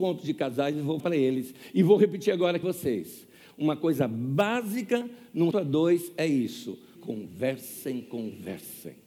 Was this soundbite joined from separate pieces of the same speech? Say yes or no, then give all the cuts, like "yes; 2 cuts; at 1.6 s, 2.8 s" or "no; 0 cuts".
yes; 4 cuts; at 1.0 s, 2.6 s, 5.5 s, 7.0 s